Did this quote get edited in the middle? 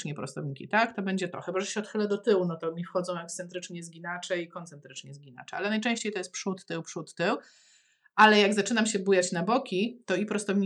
no; 0 cuts

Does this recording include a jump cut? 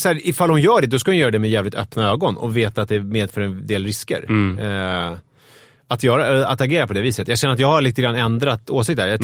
no; 0 cuts

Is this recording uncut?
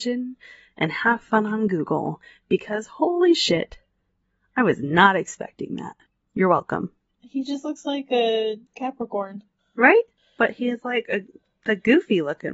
no; 1 cut; at 8.7 s

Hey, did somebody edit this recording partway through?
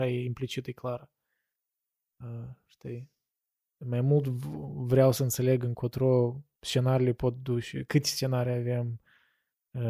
no; 0 cuts

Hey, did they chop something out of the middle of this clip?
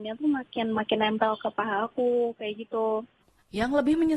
no; 0 cuts

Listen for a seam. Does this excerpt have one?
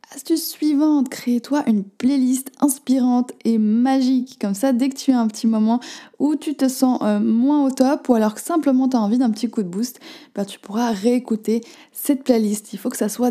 no; 0 cuts

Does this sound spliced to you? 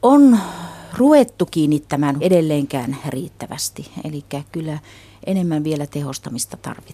yes; 1 cut; at 2.2 s

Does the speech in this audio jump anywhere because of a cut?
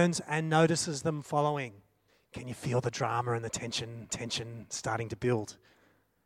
yes; 2 cuts; at 2.1 s, 4.1 s

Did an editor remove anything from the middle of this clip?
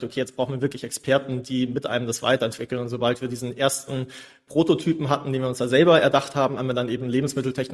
no; 0 cuts

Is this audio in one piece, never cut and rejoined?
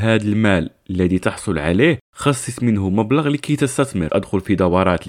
no; 2 cuts; at 2.0 s, 4.1 s

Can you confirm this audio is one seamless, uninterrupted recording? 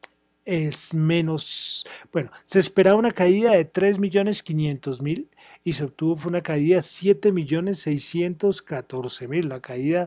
yes; 0 cuts

